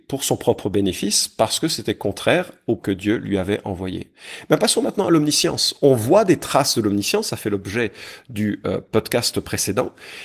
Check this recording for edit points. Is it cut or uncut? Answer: cut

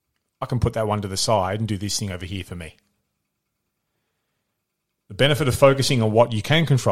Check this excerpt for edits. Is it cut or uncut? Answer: uncut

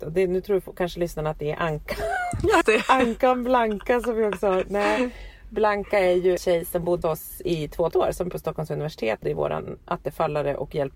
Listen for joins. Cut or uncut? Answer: cut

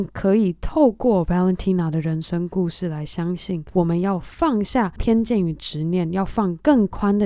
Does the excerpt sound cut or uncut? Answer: uncut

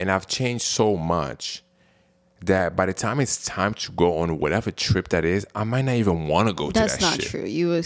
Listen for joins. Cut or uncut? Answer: uncut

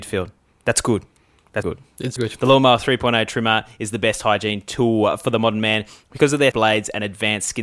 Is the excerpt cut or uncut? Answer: cut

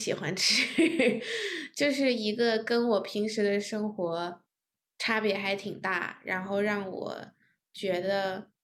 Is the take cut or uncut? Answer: uncut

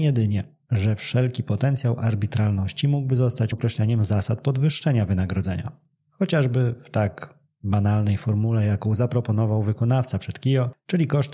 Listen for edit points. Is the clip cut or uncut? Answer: cut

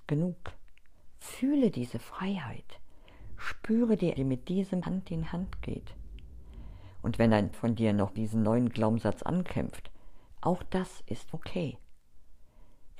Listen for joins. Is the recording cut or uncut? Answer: cut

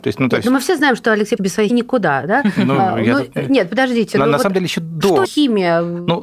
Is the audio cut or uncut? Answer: cut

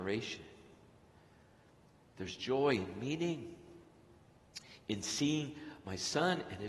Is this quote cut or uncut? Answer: uncut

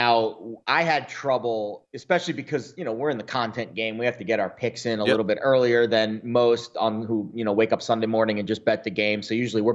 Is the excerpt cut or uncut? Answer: uncut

